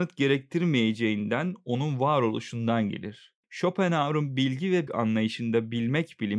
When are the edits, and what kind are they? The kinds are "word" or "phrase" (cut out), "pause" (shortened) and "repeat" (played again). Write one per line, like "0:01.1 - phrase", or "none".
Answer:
0:03.4 - pause
0:04.9 - word